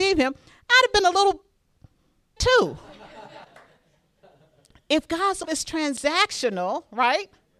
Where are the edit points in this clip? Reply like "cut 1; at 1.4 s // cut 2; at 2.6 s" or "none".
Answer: cut 1; at 2.4 s // cut 2; at 3.4 s // cut 3; at 5.4 s